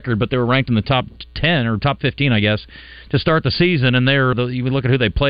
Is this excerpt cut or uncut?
cut